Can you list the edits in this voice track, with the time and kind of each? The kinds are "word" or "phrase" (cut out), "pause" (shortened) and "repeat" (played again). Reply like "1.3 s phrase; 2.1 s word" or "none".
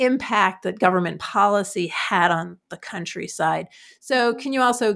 none